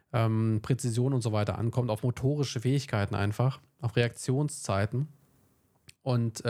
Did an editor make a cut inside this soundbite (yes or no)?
no